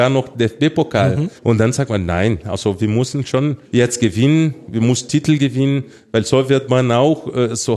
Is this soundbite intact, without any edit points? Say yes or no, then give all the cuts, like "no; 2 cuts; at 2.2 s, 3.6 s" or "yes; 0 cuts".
no; 2 cuts; at 1.4 s, 3.6 s